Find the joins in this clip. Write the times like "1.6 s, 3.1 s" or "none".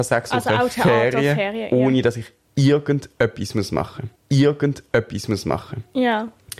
4.2 s